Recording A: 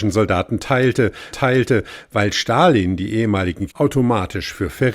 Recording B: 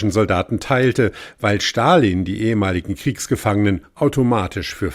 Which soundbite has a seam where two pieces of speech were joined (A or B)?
A